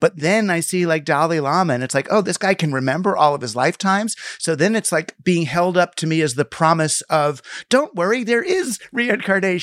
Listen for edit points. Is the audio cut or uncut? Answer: uncut